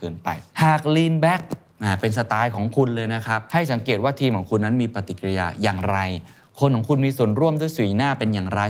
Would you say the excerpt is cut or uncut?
uncut